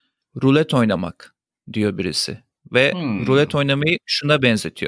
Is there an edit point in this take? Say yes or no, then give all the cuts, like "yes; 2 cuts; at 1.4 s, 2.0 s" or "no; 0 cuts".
no; 0 cuts